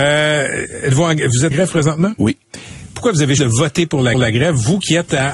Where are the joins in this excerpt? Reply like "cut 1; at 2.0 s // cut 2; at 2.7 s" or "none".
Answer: cut 1; at 1.5 s // cut 2; at 3.4 s // cut 3; at 4.1 s